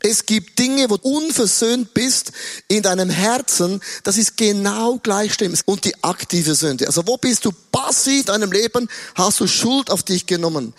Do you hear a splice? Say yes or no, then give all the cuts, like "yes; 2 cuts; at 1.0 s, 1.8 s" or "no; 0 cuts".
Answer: yes; 3 cuts; at 1.0 s, 5.6 s, 8.2 s